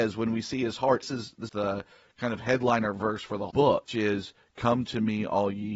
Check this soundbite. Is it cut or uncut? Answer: cut